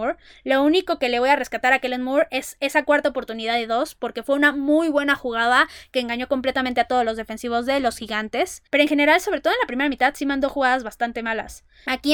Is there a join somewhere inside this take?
yes; 1 cut; at 8.7 s

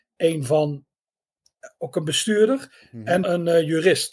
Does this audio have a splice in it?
yes; 1 cut; at 3.2 s

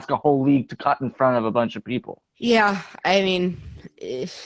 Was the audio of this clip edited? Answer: yes; 1 cut; at 2.3 s

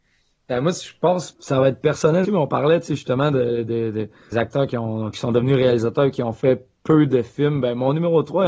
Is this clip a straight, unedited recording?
no; 3 cuts; at 1.3 s, 2.2 s, 4.3 s

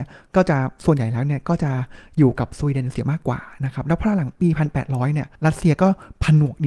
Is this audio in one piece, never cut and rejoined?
no; 1 cut; at 5.3 s

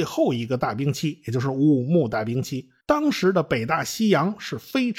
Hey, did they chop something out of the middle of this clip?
yes; 1 cut; at 2.8 s

